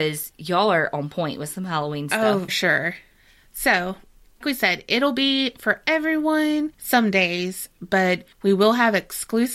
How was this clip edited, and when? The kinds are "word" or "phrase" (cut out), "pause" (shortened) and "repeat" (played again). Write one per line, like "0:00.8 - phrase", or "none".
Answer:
0:02.5 - word
0:04.4 - word
0:06.7 - pause
0:08.3 - pause